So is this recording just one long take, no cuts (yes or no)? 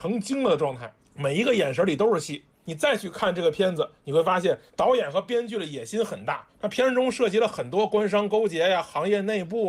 no